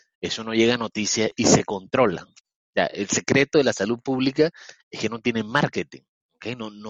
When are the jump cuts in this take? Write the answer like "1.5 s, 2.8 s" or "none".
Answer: none